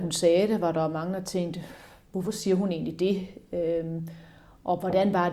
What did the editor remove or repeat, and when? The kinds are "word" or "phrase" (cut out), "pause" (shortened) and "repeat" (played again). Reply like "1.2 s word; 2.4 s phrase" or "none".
none

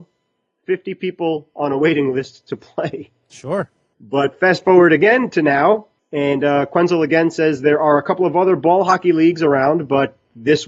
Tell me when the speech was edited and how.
none

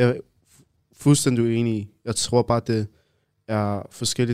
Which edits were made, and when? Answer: none

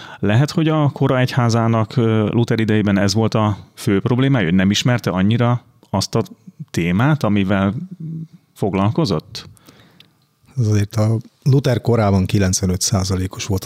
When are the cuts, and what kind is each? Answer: none

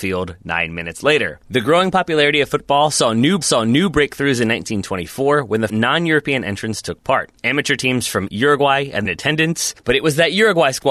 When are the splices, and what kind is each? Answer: 1.4 s pause; 3.4 s repeat; 5.7 s word; 7.4 s pause; 8.3 s word; 9.0 s phrase; 9.8 s pause

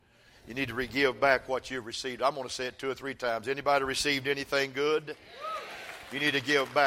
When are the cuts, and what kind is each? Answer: none

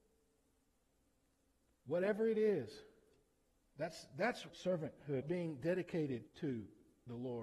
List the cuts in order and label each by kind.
3.5 s pause; 4.5 s word; 5.2 s phrase; 6.3 s pause

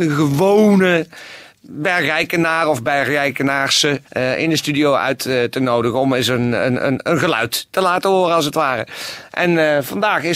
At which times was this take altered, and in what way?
4.1 s pause

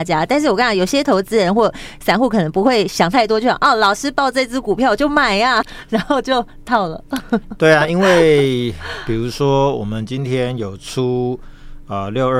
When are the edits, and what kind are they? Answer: 5.6 s word

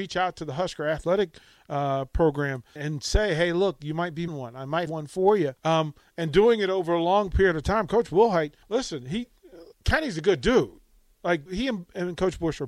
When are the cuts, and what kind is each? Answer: 2.8 s word; 4.3 s word; 4.9 s word; 5.6 s pause; 8.6 s pause; 9.7 s pause; 11.5 s phrase

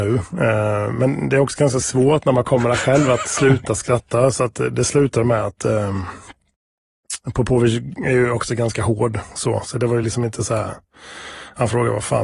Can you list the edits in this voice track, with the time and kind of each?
none

